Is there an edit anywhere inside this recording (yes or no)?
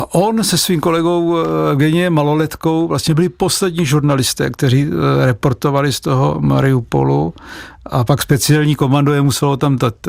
no